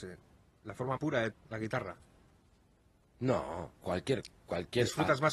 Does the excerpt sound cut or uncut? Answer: cut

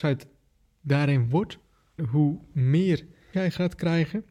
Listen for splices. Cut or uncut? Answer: cut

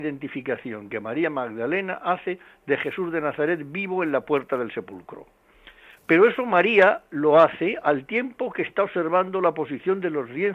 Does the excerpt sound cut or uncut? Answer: uncut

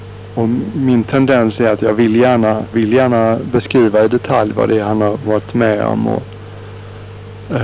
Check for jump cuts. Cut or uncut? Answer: cut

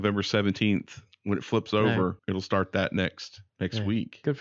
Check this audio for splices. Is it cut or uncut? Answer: cut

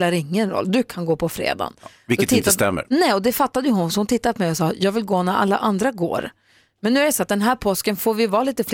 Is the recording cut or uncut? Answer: uncut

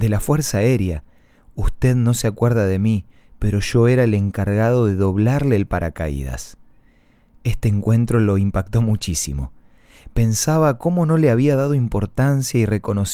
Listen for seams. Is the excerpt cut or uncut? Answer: uncut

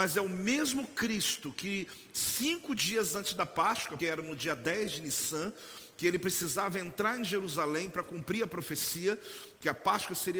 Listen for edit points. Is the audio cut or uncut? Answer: cut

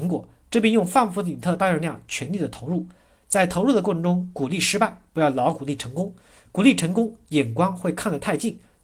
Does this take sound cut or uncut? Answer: uncut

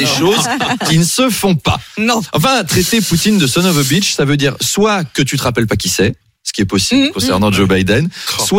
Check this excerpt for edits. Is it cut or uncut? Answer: uncut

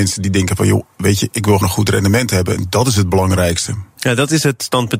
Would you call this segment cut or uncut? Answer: cut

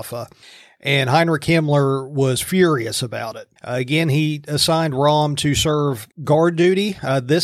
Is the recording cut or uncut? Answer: cut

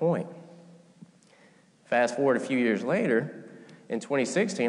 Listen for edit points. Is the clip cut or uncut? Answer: uncut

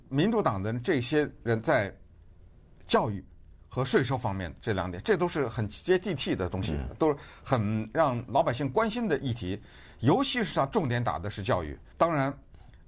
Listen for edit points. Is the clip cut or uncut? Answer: cut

